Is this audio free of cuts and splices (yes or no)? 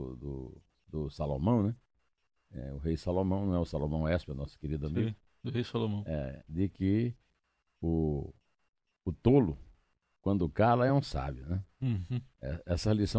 yes